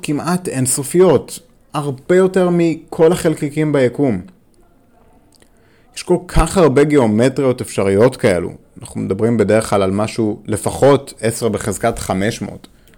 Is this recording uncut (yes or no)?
yes